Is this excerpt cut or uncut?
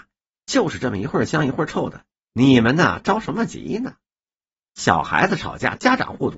uncut